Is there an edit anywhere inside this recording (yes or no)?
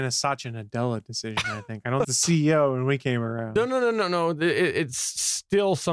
yes